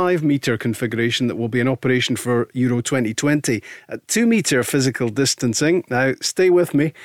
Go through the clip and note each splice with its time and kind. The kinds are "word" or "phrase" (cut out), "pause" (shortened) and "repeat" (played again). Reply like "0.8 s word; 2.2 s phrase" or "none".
none